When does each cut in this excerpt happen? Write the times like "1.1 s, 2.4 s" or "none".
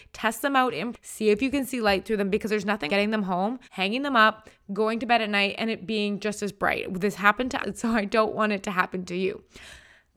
0.9 s, 2.9 s, 3.6 s, 7.6 s